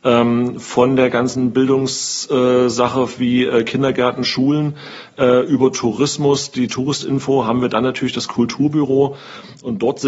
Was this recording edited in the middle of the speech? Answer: no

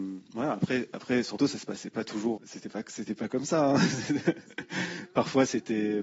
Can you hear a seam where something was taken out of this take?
yes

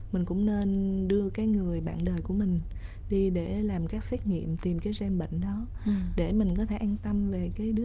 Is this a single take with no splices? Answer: yes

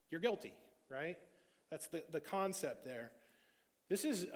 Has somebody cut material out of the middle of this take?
no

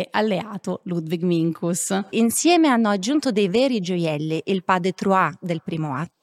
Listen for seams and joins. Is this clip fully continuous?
yes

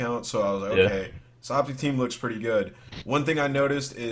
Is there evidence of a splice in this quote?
no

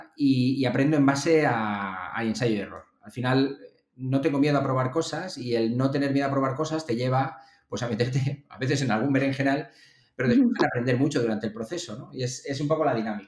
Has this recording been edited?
no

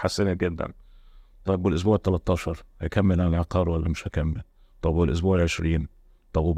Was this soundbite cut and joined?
no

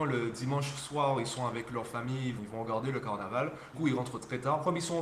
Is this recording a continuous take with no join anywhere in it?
no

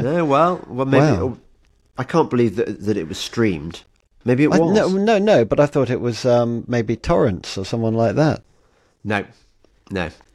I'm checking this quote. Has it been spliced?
no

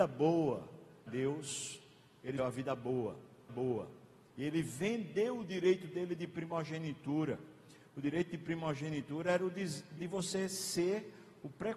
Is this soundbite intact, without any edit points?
no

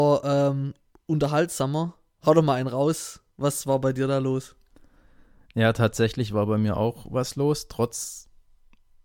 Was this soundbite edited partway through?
no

